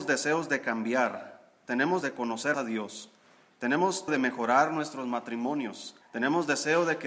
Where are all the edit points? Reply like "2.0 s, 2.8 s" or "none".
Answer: 2.0 s, 2.5 s, 4.1 s, 6.0 s